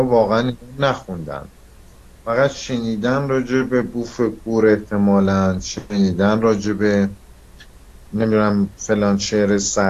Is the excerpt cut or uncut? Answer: uncut